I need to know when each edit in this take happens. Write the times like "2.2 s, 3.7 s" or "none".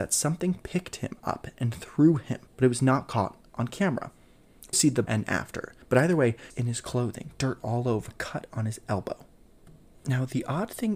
2.5 s, 4.7 s, 5.0 s, 5.8 s, 6.5 s, 8.1 s